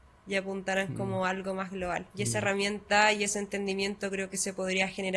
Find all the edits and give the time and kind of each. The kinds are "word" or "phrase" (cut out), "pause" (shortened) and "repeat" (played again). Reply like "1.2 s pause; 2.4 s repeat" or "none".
2.1 s pause